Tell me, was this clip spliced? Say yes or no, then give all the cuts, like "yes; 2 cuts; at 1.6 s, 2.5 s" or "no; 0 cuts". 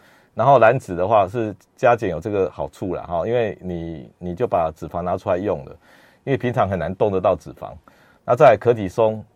no; 0 cuts